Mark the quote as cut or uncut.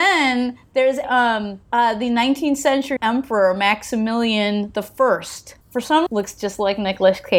cut